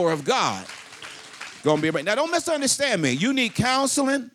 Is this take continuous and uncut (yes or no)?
yes